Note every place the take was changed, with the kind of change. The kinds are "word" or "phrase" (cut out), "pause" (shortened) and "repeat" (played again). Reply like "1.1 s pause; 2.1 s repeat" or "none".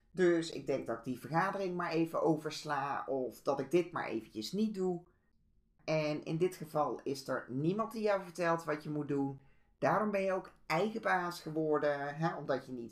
none